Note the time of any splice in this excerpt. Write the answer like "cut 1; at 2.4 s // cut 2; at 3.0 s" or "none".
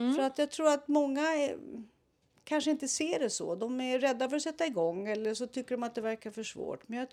none

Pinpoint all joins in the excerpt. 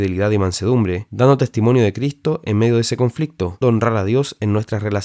cut 1; at 3.6 s

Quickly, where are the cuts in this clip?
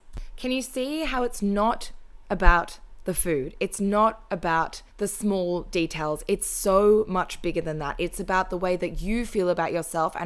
cut 1; at 4.9 s

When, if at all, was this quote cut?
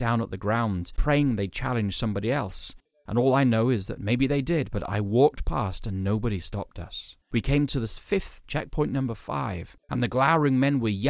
cut 1; at 7.2 s // cut 2; at 8.4 s // cut 3; at 9.8 s

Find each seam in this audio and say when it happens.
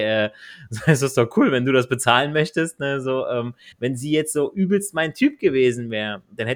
cut 1; at 3.7 s

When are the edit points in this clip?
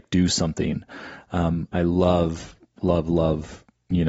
none

